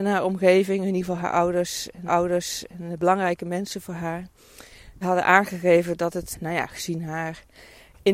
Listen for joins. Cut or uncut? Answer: cut